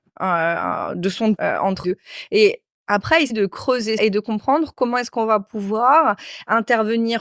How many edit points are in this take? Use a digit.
4